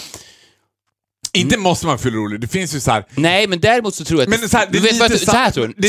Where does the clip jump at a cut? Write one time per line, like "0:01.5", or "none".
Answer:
none